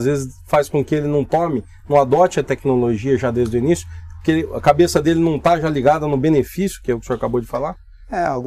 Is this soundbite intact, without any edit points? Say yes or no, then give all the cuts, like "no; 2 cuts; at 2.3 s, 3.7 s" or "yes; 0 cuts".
yes; 0 cuts